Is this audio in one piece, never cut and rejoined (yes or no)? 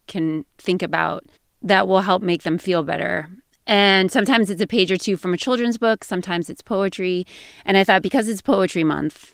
yes